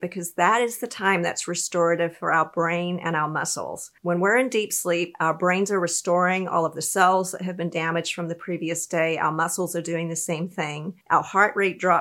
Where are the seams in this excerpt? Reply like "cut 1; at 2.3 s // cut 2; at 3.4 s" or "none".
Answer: cut 1; at 4.0 s // cut 2; at 11.0 s